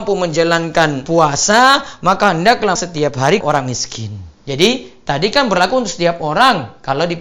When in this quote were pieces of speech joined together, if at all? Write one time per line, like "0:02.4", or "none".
0:02.8
0:03.4